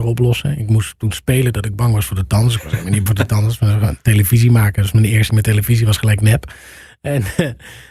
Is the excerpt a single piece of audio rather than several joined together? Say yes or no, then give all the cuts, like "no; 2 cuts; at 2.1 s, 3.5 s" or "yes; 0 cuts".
no; 2 cuts; at 3.1 s, 5.3 s